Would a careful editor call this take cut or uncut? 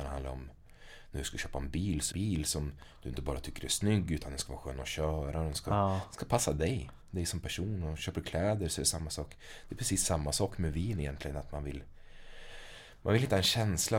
cut